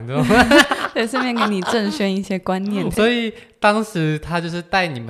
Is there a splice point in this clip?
no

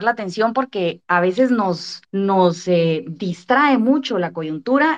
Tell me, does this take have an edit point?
no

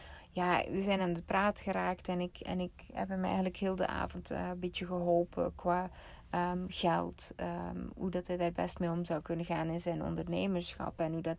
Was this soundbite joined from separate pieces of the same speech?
no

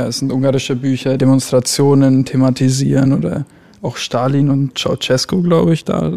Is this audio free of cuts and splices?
no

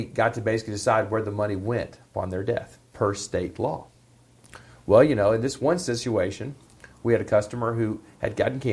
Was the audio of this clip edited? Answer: no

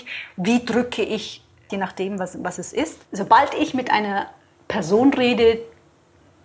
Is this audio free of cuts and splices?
no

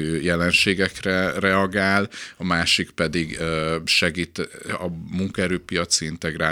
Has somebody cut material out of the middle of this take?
no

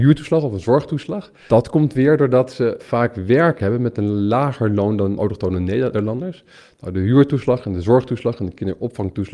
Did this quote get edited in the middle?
no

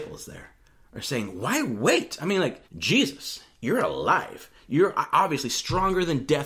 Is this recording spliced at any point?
yes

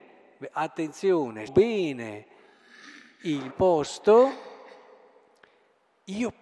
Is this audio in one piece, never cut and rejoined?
no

